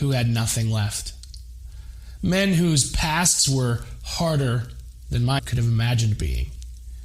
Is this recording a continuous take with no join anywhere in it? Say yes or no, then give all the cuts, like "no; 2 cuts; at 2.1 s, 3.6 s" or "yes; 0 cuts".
no; 1 cut; at 5.4 s